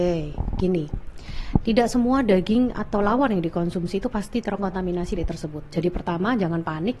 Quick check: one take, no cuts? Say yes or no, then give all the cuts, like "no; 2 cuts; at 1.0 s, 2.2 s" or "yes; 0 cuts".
no; 1 cut; at 5.2 s